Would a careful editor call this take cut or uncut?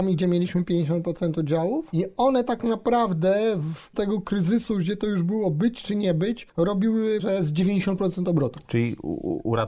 cut